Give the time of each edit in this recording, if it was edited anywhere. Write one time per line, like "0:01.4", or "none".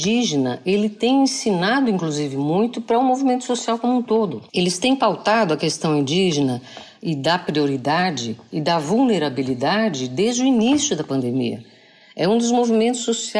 0:04.5